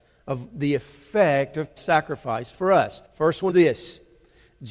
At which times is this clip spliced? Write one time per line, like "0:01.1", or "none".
0:01.8
0:03.0
0:03.5